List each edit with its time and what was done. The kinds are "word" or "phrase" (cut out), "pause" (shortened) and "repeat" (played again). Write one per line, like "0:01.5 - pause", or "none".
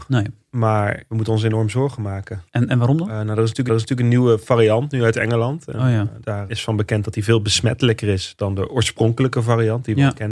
0:02.5 - pause
0:03.7 - repeat
0:06.5 - word